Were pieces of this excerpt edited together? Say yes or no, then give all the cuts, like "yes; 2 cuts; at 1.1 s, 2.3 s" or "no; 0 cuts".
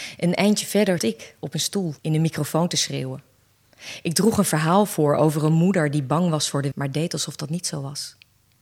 yes; 3 cuts; at 1.0 s, 2.0 s, 6.7 s